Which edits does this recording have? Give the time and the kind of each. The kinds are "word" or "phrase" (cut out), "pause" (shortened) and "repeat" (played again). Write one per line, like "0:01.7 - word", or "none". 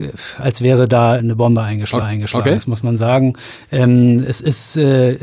0:01.2 - word
0:02.0 - repeat